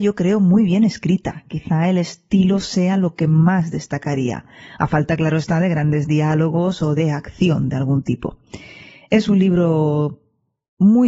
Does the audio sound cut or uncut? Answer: uncut